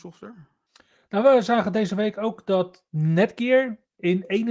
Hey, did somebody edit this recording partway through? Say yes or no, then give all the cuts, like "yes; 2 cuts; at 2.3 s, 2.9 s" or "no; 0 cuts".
no; 0 cuts